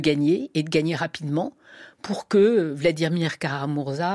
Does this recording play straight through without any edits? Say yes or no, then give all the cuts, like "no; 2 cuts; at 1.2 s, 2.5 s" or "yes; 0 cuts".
yes; 0 cuts